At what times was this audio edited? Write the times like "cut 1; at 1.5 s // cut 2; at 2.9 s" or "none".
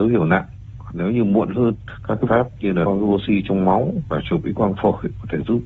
cut 1; at 2.3 s // cut 2; at 2.9 s // cut 3; at 4.0 s